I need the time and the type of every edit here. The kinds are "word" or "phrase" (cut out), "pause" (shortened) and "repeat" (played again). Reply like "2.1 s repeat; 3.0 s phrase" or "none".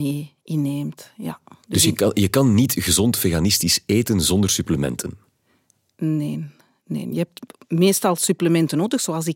none

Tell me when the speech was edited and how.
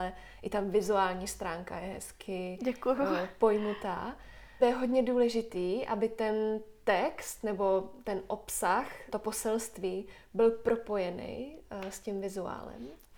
4.6 s phrase; 9.1 s word

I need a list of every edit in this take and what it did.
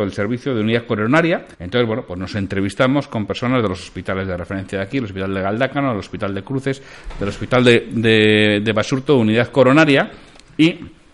1.5 s pause

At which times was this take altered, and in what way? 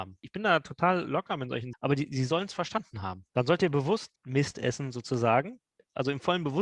1.7 s word; 4.2 s pause

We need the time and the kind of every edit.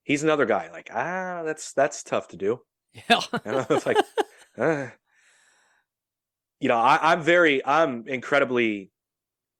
none

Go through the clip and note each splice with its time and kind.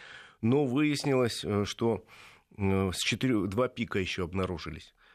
none

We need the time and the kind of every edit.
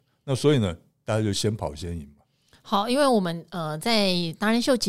none

